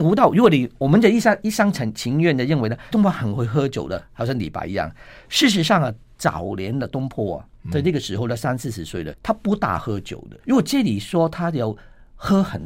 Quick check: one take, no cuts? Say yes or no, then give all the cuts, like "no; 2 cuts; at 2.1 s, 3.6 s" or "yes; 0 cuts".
no; 3 cuts; at 2.9 s, 9.1 s, 10.4 s